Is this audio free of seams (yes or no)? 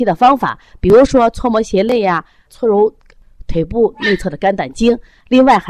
no